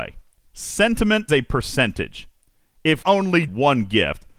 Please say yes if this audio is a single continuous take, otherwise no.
no